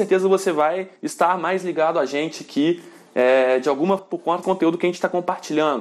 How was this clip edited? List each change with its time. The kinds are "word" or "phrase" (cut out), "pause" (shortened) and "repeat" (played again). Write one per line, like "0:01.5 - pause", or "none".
0:01.0 - pause
0:04.0 - word
0:04.4 - word